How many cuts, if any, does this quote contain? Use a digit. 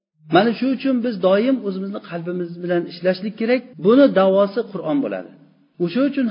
1